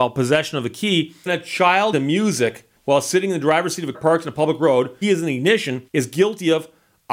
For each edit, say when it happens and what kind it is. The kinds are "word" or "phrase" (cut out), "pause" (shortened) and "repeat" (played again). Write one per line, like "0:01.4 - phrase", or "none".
0:01.3 - word
0:01.9 - phrase
0:02.8 - pause
0:03.9 - word
0:05.0 - phrase
0:05.9 - pause